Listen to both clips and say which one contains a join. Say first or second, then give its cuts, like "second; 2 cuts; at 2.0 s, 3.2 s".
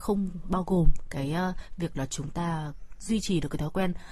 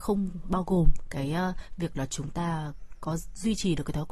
first; 1 cut; at 3.0 s